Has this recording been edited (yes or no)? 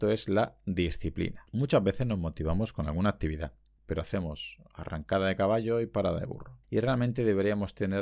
no